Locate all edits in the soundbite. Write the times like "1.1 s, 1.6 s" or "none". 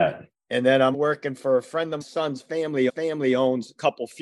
0.9 s, 2.0 s, 2.9 s